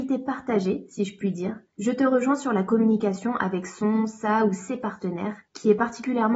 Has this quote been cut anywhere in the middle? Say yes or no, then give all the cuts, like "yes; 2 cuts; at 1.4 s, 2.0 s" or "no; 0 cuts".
yes; 1 cut; at 1.7 s